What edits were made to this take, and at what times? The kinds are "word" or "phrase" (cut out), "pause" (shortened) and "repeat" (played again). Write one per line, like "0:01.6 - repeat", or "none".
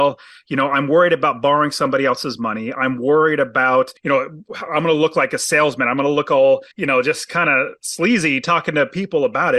0:04.0 - pause
0:06.7 - pause

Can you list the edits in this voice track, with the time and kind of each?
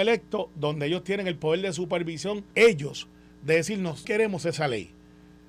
0:02.5 - pause
0:04.0 - word

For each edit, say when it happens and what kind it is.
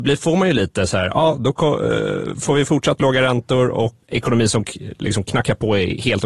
0:04.0 - word

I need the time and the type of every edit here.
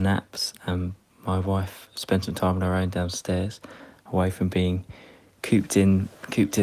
none

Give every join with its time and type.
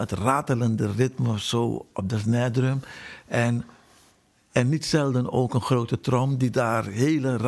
none

